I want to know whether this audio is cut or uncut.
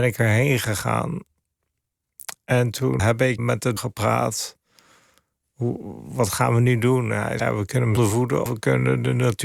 cut